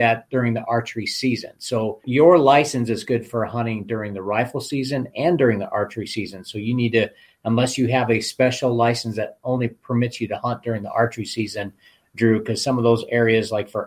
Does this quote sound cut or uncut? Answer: uncut